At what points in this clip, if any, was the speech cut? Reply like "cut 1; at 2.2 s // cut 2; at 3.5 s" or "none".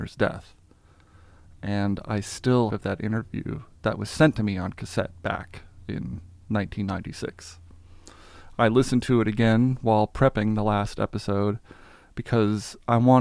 cut 1; at 2.7 s